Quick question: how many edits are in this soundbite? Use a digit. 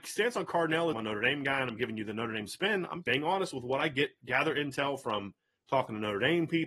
2